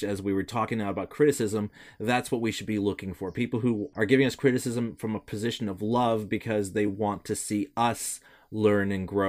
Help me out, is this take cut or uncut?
uncut